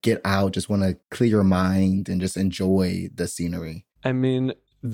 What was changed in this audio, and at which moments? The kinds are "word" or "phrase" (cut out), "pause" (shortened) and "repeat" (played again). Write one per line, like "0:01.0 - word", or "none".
0:01.0 - pause
0:03.9 - pause